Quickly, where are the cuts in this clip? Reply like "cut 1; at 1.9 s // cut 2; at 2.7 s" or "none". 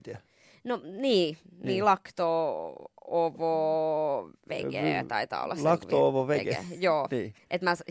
none

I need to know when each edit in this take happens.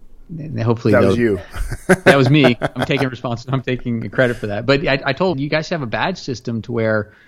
cut 1; at 5.3 s

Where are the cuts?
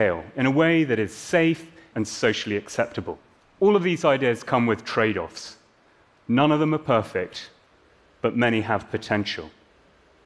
cut 1; at 1.9 s // cut 2; at 3.4 s

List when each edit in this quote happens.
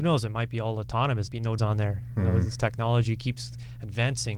cut 1; at 1.3 s // cut 2; at 1.6 s // cut 3; at 2.6 s

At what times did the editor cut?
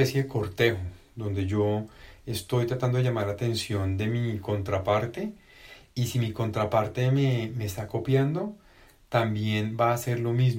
none

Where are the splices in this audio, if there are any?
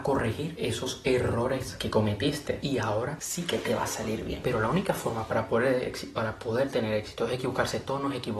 none

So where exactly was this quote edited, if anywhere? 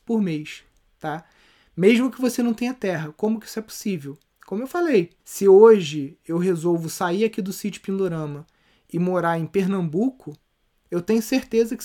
cut 1; at 5.2 s

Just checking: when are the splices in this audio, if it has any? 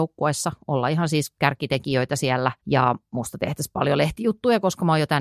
cut 1; at 2.6 s

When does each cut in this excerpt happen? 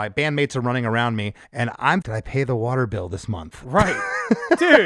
cut 1; at 1.4 s // cut 2; at 2.0 s

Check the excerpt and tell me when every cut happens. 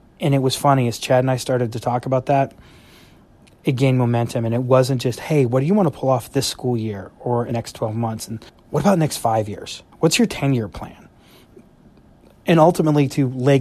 cut 1; at 7.5 s // cut 2; at 8.5 s // cut 3; at 9.9 s

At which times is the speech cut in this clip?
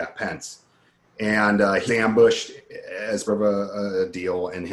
cut 1; at 1.9 s // cut 2; at 3.3 s

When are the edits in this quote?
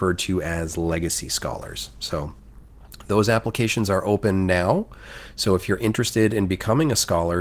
none

